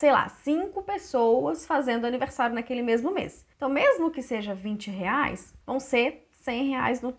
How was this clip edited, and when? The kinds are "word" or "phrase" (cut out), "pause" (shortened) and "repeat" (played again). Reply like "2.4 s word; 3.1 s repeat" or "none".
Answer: 3.5 s pause; 5.6 s pause